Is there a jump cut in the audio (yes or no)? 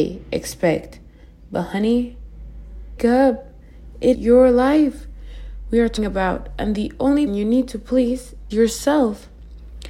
yes